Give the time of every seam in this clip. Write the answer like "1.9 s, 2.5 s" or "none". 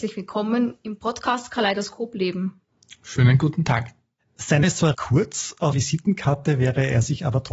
4.6 s, 4.9 s, 5.7 s